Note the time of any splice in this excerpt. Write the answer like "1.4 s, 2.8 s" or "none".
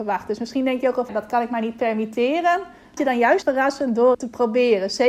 1.1 s, 3.0 s, 3.4 s, 4.1 s